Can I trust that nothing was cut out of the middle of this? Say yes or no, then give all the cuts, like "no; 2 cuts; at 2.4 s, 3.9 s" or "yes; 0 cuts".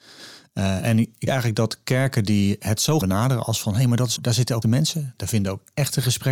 no; 4 cuts; at 1.3 s, 3.0 s, 4.2 s, 4.6 s